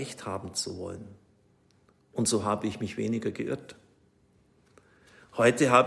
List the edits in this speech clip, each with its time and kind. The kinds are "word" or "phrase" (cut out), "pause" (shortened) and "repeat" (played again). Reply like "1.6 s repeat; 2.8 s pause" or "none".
none